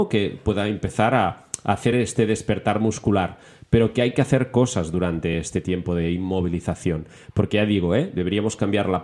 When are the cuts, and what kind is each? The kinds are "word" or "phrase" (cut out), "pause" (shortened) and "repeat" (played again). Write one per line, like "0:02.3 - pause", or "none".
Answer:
none

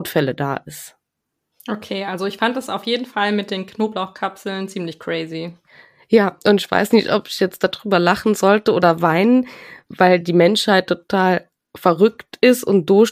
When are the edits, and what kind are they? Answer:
none

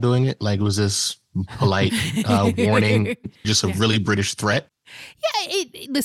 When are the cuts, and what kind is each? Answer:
0:03.4 - word

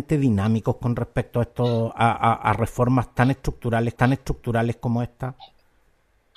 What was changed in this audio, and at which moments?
0:04.0 - repeat

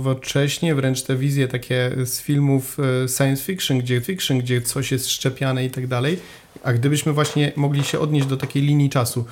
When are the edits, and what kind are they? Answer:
0:04.0 - repeat

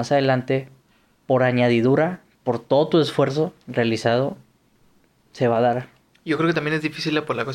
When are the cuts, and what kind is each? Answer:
0:03.6 - pause

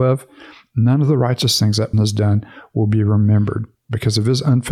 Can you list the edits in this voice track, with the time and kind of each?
0:01.9 - word

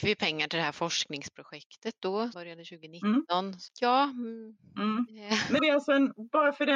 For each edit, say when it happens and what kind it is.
0:02.3 - word
0:03.7 - word
0:05.6 - word

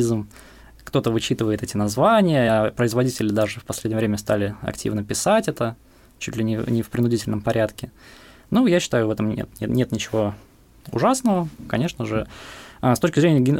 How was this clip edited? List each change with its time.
none

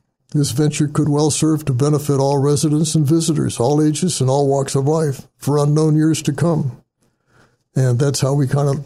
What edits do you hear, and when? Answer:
none

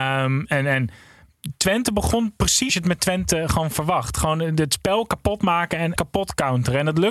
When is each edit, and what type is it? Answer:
0:02.7 - word
0:06.0 - phrase

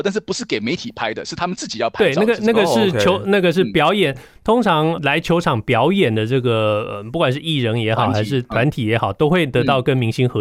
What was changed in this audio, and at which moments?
0:04.9 - word

